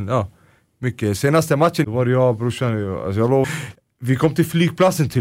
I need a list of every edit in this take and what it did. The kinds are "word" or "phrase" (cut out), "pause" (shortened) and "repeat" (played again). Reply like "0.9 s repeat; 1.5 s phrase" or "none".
1.8 s phrase; 3.4 s word